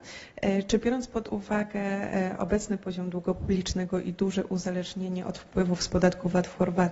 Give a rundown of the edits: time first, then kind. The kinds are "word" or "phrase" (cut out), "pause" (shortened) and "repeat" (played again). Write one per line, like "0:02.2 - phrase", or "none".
none